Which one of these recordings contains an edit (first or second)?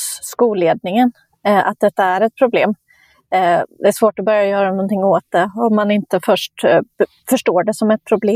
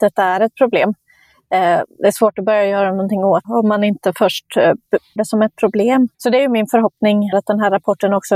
second